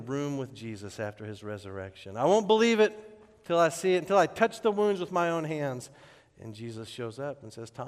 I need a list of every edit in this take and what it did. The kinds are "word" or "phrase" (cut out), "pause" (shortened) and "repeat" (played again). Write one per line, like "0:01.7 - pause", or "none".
none